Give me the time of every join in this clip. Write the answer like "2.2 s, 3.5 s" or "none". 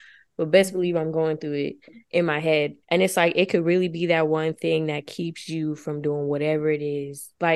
2.0 s, 2.8 s